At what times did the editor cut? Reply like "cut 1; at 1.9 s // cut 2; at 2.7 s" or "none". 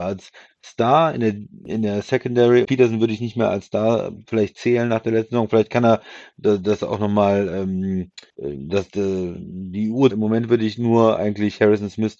cut 1; at 2.6 s // cut 2; at 8.3 s // cut 3; at 10.1 s